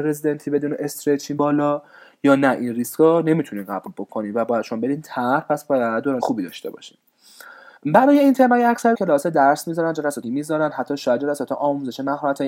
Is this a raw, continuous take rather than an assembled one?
no; 5 cuts; at 1.4 s, 6.2 s, 7.8 s, 8.9 s, 10.2 s

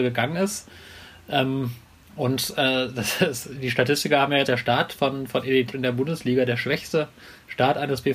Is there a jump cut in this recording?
yes; 3 cuts; at 2.0 s, 4.5 s, 5.7 s

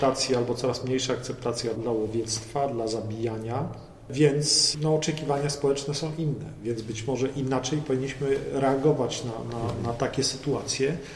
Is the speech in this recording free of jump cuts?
no; 1 cut; at 1.7 s

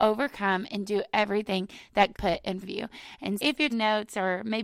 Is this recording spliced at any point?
yes; 4 cuts; at 2.1 s, 2.6 s, 3.4 s, 3.7 s

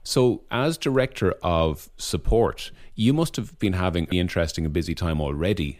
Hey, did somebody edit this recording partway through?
yes; 1 cut; at 4.1 s

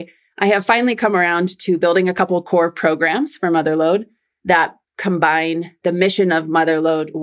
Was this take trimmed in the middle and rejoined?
no; 0 cuts

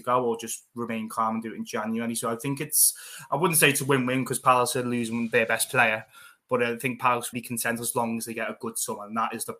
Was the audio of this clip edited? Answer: yes; 1 cut; at 7.3 s

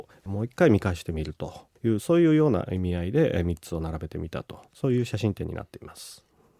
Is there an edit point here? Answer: yes; 2 cuts; at 1.8 s, 4.7 s

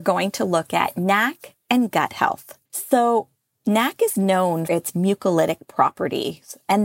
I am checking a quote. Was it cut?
yes; 2 cuts; at 2.6 s, 4.7 s

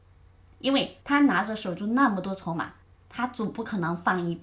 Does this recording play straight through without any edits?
no; 2 cuts; at 1.0 s, 2.8 s

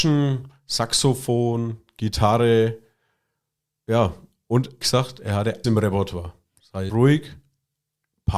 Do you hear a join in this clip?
yes; 3 cuts; at 4.8 s, 5.6 s, 6.9 s

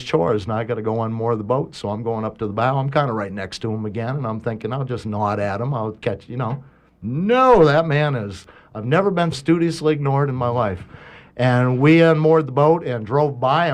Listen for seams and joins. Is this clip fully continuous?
no; 1 cut; at 9.3 s

